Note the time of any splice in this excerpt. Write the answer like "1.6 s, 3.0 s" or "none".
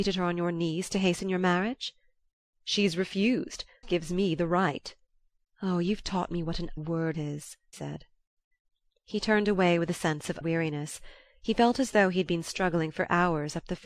3.8 s, 6.8 s, 7.1 s, 7.7 s, 10.4 s